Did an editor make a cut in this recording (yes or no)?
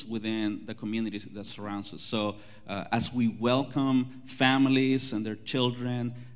no